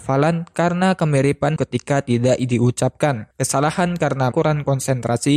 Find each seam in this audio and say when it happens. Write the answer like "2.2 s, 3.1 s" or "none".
1.6 s, 3.3 s, 4.3 s